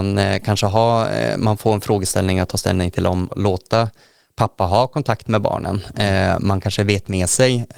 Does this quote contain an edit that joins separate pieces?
yes; 1 cut; at 3.3 s

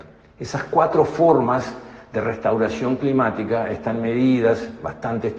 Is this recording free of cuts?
yes; 0 cuts

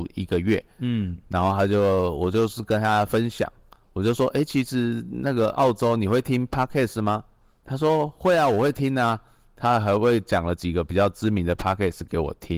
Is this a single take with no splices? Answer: yes; 0 cuts

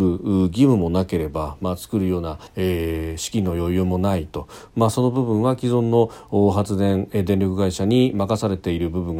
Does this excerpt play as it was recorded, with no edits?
no; 1 cut; at 2.5 s

